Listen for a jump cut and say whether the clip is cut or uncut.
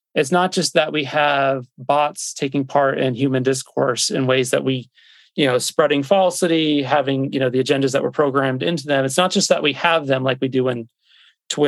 uncut